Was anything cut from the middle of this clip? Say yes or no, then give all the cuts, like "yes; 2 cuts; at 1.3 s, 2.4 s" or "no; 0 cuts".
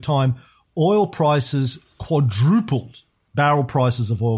no; 0 cuts